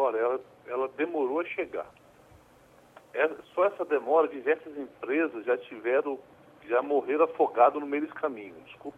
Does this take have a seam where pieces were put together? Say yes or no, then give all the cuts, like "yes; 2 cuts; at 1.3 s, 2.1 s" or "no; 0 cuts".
no; 0 cuts